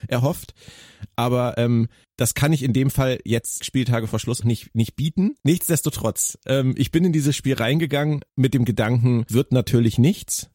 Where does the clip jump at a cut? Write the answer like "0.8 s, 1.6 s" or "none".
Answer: 2.0 s, 3.6 s, 4.4 s, 5.4 s, 8.3 s, 9.3 s